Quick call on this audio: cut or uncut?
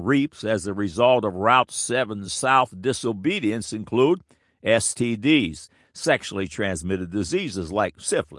uncut